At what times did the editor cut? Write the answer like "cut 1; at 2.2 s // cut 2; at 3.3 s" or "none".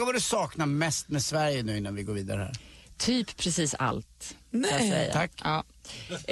none